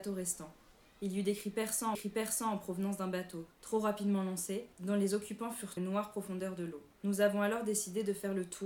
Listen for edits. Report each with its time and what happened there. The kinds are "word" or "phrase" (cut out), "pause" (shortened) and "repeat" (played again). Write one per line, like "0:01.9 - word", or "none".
0:01.9 - repeat
0:03.5 - pause
0:04.7 - pause
0:05.8 - phrase
0:06.9 - pause

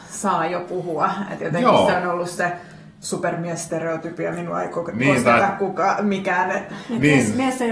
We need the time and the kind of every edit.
none

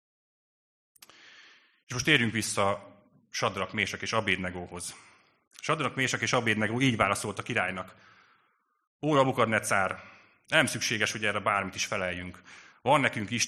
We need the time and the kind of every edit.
none

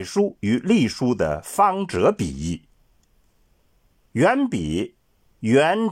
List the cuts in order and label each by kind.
none

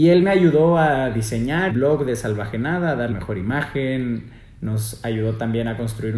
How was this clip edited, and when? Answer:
0:01.7 - word
0:03.1 - word

